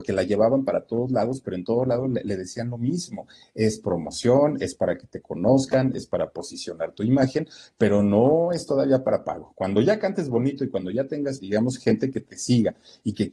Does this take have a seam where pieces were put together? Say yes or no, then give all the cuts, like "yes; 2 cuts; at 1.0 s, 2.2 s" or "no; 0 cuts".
yes; 1 cut; at 11.4 s